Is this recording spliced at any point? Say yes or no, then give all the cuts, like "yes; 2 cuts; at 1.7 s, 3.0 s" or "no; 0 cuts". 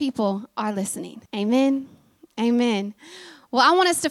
yes; 1 cut; at 1.3 s